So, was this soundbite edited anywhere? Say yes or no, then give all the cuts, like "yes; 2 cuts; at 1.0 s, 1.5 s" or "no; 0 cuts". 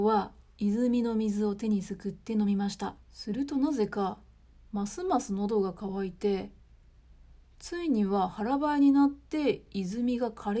yes; 1 cut; at 3.0 s